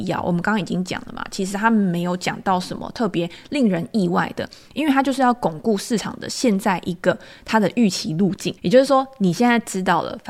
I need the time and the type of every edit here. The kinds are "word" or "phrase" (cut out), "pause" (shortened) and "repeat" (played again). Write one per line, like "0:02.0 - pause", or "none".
0:08.6 - pause